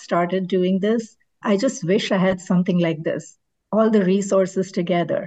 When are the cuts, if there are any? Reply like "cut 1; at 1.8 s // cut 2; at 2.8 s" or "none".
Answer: none